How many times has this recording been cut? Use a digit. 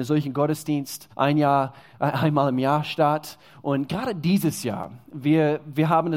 1